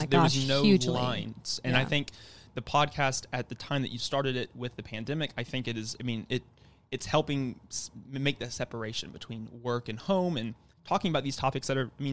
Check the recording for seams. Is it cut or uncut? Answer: uncut